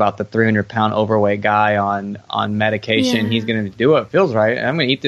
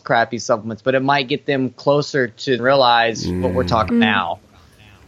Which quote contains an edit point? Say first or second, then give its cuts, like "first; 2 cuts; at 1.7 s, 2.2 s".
second; 2 cuts; at 2.6 s, 3.9 s